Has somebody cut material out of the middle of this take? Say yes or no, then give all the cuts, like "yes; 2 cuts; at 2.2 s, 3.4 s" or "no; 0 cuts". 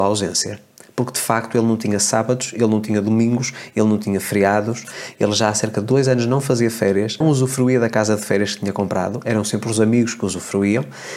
yes; 1 cut; at 7.2 s